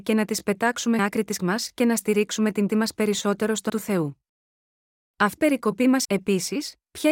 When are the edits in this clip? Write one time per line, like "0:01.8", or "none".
0:01.0
0:01.4
0:02.7
0:03.7
0:05.4
0:06.0